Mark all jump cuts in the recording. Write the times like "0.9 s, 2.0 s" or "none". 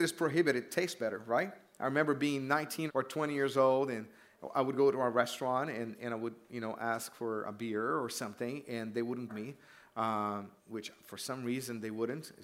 2.9 s, 9.3 s, 10.6 s

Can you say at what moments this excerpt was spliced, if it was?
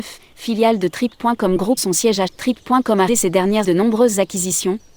1.8 s, 2.3 s, 3.1 s, 3.6 s

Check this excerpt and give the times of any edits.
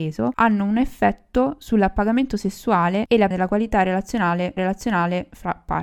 3.3 s, 4.6 s

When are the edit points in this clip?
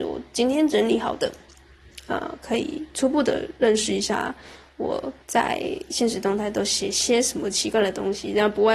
5.2 s

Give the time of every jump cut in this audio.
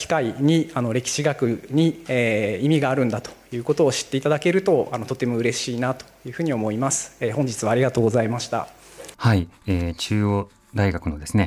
9.1 s

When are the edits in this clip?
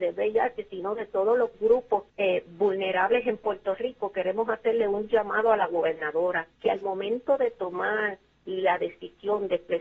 2.1 s, 6.5 s

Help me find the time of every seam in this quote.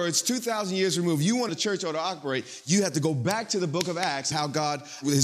1.5 s, 4.3 s

